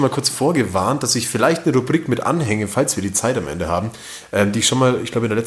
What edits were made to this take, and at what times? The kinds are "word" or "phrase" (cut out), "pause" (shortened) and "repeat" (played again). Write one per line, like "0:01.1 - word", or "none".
none

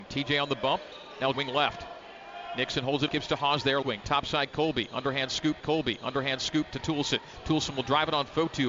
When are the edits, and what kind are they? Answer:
0:01.3 - word
0:03.1 - phrase
0:03.8 - word
0:05.6 - repeat

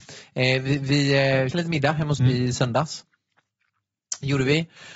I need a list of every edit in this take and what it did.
0:01.5 - word
0:02.2 - word

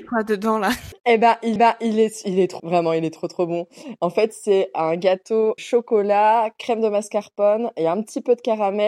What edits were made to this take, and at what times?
0:01.6 - repeat
0:02.6 - word
0:05.6 - word

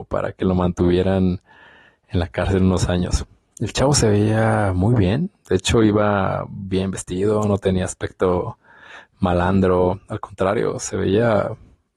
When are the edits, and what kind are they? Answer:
none

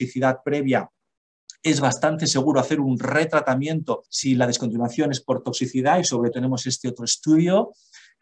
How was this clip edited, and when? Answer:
0:04.1 - pause
0:06.3 - word

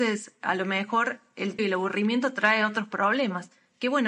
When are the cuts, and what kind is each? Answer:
0:01.6 - word

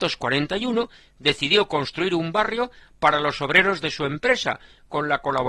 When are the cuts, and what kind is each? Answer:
none

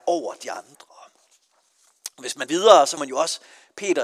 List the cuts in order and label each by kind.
0:02.5 - word
0:03.0 - word

